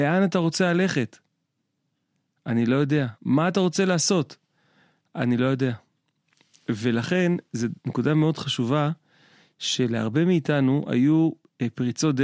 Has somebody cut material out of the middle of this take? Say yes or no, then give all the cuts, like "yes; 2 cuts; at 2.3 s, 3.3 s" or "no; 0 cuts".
no; 0 cuts